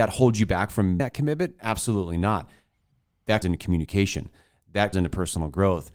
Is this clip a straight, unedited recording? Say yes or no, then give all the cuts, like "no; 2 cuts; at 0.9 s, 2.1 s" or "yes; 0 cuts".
no; 3 cuts; at 1.0 s, 3.4 s, 4.9 s